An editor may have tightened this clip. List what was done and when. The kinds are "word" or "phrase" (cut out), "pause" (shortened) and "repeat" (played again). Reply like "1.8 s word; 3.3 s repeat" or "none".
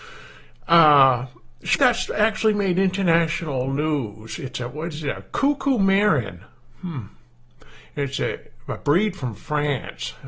1.7 s phrase